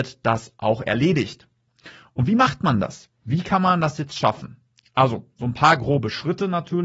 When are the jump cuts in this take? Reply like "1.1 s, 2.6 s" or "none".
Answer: none